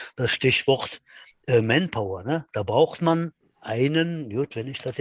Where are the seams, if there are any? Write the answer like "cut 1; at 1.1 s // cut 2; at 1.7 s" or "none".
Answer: none

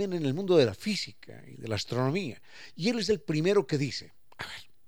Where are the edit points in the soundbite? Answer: none

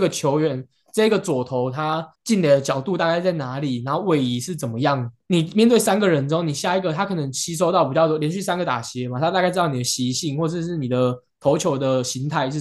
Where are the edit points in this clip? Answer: cut 1; at 2.2 s

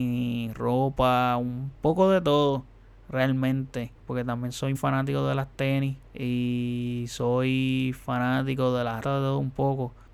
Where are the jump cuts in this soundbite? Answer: cut 1; at 4.0 s // cut 2; at 4.8 s // cut 3; at 6.1 s // cut 4; at 9.0 s

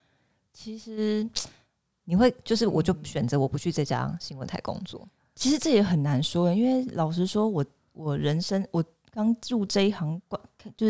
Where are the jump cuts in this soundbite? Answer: none

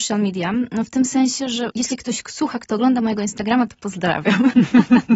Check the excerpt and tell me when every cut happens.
none

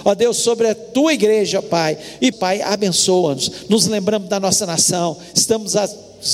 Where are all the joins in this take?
cut 1; at 2.3 s

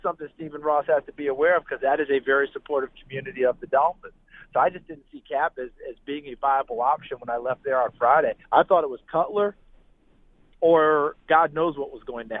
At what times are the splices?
cut 1; at 8.4 s

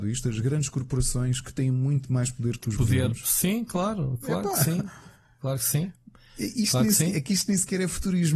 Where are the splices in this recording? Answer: none

